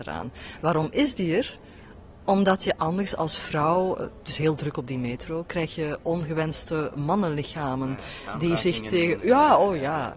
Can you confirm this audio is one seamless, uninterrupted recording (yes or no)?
yes